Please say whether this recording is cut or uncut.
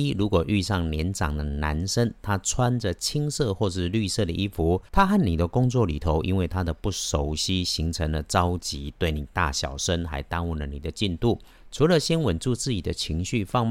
cut